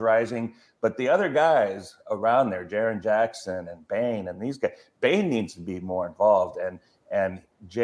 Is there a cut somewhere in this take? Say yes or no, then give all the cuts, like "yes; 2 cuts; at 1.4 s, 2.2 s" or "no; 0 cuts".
no; 0 cuts